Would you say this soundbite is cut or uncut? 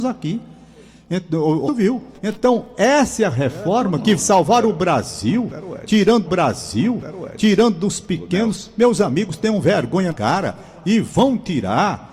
cut